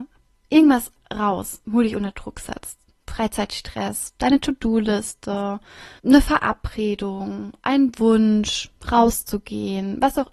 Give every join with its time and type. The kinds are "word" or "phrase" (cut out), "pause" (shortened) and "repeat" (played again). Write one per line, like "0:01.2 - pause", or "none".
0:06.0 - pause